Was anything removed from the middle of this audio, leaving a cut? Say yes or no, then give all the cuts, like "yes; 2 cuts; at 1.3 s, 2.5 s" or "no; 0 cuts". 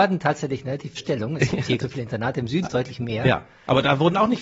yes; 3 cuts; at 1.0 s, 1.8 s, 2.6 s